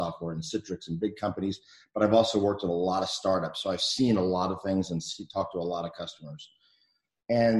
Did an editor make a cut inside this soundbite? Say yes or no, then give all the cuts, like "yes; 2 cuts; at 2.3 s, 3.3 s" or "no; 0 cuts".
no; 0 cuts